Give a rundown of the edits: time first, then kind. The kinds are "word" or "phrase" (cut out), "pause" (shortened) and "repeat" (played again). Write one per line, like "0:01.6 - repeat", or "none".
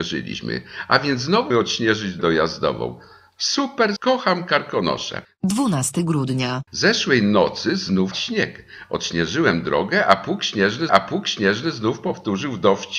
0:01.5 - word
0:02.2 - word
0:04.0 - word
0:05.2 - pause
0:06.7 - pause
0:08.1 - word
0:10.9 - repeat

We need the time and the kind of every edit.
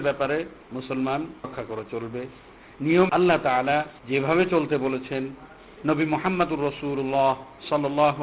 0:01.4 - word
0:03.1 - phrase
0:04.0 - pause

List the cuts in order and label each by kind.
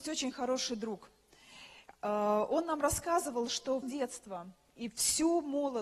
0:03.8 - word

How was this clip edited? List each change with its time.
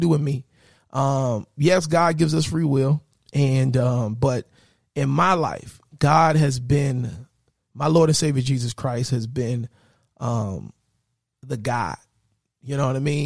none

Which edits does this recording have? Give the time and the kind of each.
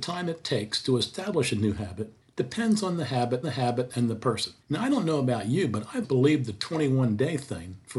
0:02.2 - pause
0:03.4 - repeat
0:04.6 - pause
0:06.0 - word

